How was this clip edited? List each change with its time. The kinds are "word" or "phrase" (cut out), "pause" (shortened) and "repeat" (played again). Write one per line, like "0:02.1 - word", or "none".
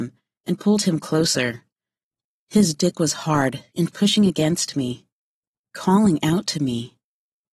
none